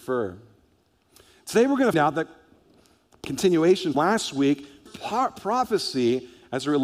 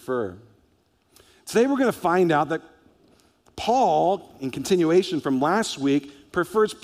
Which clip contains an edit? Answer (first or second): first